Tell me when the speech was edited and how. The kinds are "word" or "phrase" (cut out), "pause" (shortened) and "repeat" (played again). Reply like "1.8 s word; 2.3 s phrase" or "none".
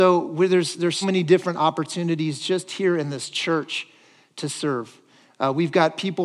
1.0 s word